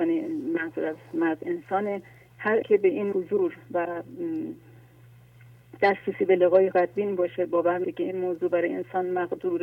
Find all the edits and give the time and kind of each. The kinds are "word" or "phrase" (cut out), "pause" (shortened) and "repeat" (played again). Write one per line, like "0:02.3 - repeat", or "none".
0:02.6 - word
0:03.1 - word
0:06.7 - word
0:07.8 - phrase